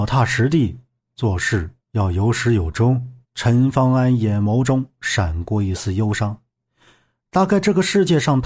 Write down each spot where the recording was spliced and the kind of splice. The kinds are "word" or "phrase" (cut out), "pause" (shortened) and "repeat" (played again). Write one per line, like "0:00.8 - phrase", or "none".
0:03.2 - pause